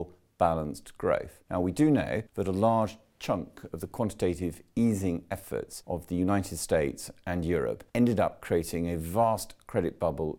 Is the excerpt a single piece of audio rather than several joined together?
no; 2 cuts; at 2.3 s, 7.9 s

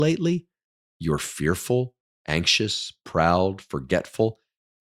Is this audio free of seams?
yes; 0 cuts

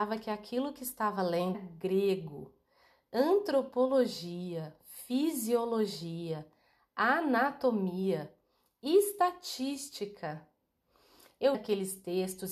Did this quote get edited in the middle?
yes; 2 cuts; at 1.5 s, 11.5 s

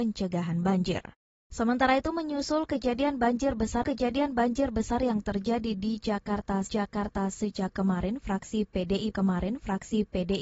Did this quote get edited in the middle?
yes; 4 cuts; at 1.3 s, 3.8 s, 6.7 s, 9.1 s

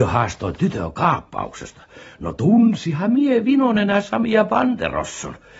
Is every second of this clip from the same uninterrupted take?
yes; 0 cuts

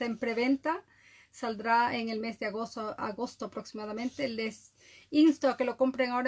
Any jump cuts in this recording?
no; 0 cuts

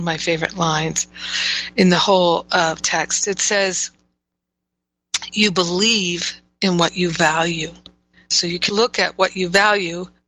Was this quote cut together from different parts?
yes; 3 cuts; at 2.8 s, 8.1 s, 8.7 s

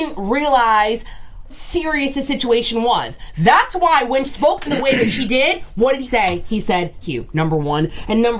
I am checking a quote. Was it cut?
yes; 5 cuts; at 1.5 s, 4.2 s, 4.6 s, 6.0 s, 7.0 s

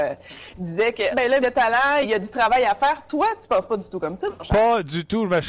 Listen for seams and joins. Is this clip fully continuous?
no; 3 cuts; at 1.1 s, 1.4 s, 2.0 s

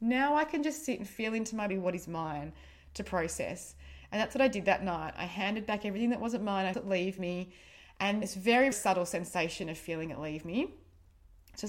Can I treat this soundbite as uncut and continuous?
no; 4 cuts; at 1.7 s, 6.7 s, 8.2 s, 8.7 s

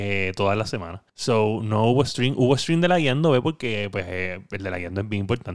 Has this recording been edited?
yes; 1 cut; at 1.1 s

